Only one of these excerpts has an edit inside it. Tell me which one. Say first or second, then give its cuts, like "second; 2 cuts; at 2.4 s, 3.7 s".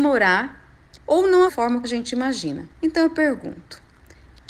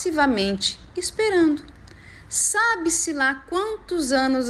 first; 4 cuts; at 1.0 s, 1.5 s, 1.8 s, 2.7 s